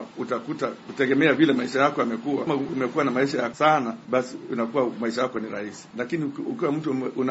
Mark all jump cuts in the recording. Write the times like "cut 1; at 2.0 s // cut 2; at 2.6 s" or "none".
cut 1; at 2.5 s // cut 2; at 3.5 s